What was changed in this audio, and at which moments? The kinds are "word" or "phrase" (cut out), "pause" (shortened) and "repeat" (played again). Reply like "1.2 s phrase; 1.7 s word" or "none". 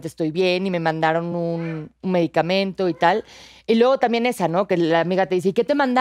none